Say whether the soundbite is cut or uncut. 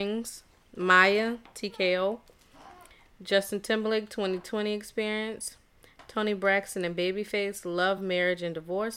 uncut